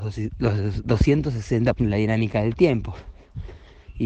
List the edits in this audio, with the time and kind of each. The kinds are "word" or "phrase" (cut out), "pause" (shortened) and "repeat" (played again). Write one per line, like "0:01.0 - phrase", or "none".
0:01.8 - word